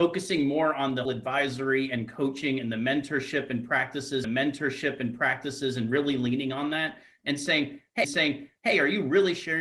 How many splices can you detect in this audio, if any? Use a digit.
3